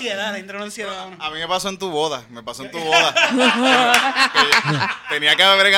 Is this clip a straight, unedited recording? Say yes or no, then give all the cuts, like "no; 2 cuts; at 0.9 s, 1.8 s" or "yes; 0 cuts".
yes; 0 cuts